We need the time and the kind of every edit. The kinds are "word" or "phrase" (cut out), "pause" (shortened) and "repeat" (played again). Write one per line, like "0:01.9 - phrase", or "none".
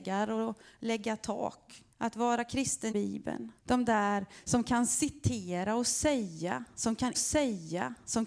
0:01.9 - pause
0:02.9 - phrase
0:03.6 - pause
0:07.1 - repeat